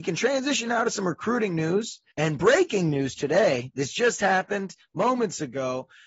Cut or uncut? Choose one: cut